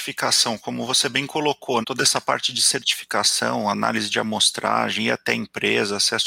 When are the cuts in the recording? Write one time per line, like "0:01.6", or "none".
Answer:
0:01.8